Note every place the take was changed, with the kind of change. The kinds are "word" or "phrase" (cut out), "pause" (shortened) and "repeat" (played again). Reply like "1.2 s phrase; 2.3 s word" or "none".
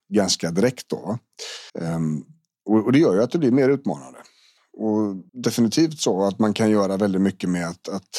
1.7 s pause; 5.3 s pause

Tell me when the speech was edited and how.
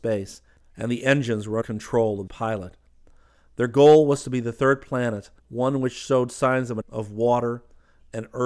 1.6 s word; 2.3 s phrase; 5.4 s pause; 6.8 s word

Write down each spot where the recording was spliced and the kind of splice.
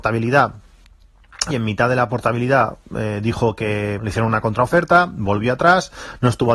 1.5 s phrase; 4.0 s word

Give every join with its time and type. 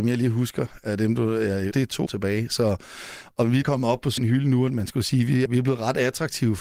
1.7 s word; 2.1 s word; 3.6 s word; 4.2 s word; 5.5 s word

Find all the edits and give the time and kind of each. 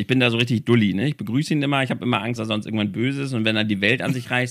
2.4 s word

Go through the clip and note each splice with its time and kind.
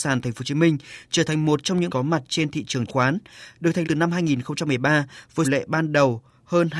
1.9 s phrase; 2.9 s word; 3.8 s word; 5.4 s phrase

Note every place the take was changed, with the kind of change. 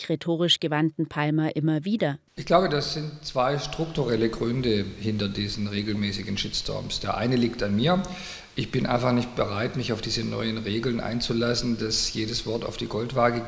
2.3 s pause

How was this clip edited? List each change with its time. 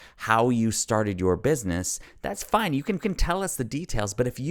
3.0 s repeat

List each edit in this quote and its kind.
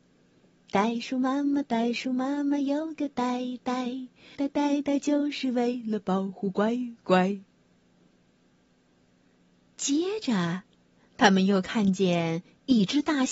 4.4 s word

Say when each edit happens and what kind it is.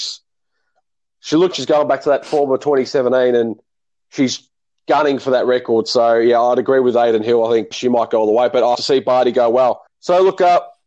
1.5 s word; 7.7 s word; 8.7 s word; 9.9 s pause

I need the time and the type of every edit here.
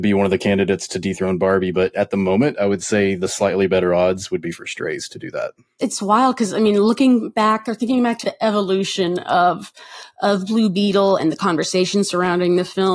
8.2 s word; 11.2 s word

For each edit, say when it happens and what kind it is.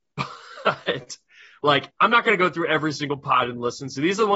none

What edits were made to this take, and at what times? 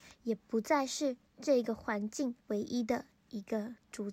2.4 s pause

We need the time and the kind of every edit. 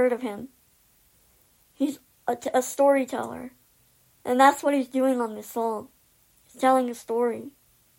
none

